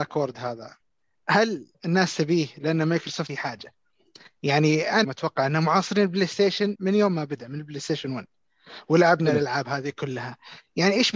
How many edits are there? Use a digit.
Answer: 4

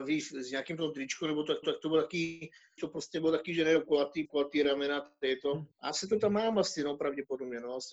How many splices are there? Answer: 4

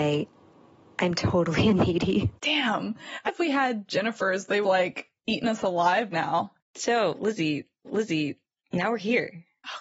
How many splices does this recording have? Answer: 6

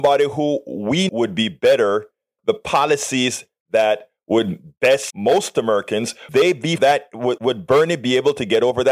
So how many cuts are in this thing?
6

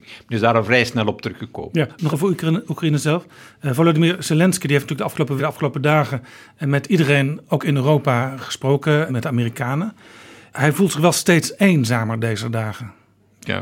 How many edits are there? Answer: 3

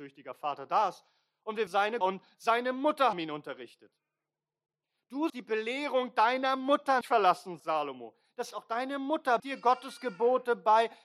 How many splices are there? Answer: 8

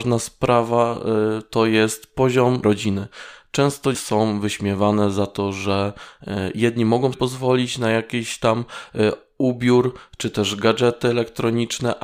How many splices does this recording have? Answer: 3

